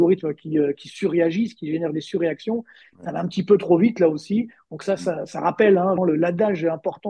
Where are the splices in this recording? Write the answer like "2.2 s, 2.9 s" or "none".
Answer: 6.0 s